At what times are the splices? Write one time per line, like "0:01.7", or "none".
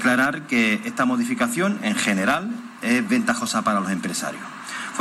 none